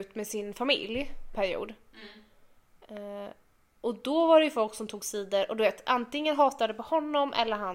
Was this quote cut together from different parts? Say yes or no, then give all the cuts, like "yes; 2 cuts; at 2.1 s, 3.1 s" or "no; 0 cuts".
yes; 1 cut; at 1.3 s